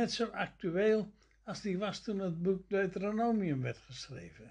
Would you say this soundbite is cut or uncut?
uncut